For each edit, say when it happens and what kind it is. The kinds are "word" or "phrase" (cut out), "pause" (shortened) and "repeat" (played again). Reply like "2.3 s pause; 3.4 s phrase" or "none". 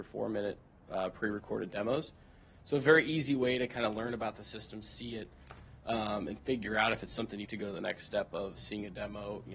7.4 s phrase